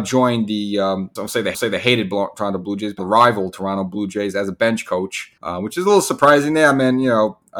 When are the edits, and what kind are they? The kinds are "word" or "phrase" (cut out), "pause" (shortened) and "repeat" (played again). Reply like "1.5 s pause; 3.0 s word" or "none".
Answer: 1.2 s word; 1.5 s repeat; 3.0 s word; 5.4 s pause